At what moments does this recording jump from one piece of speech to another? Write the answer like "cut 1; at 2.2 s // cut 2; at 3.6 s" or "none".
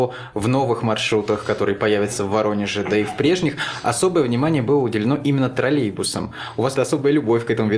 cut 1; at 6.8 s